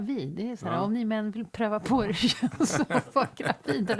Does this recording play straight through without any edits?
yes; 0 cuts

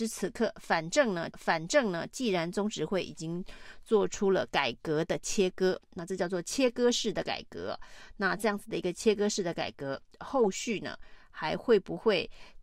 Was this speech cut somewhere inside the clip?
yes; 1 cut; at 1.3 s

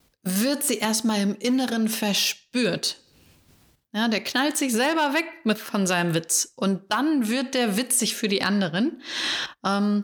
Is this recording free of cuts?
yes; 0 cuts

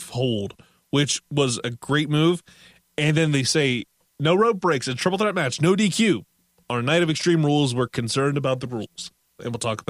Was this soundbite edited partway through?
no; 0 cuts

